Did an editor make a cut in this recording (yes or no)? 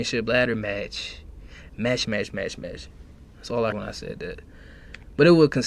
yes